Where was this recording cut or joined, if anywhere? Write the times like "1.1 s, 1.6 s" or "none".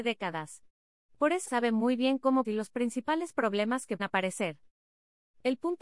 1.5 s, 2.4 s, 4.0 s